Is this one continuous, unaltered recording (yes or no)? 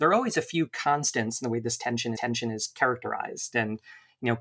no